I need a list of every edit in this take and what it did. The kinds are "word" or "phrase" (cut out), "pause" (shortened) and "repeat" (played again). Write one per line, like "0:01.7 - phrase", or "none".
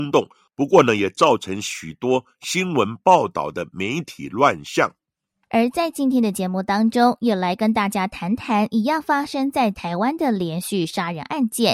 none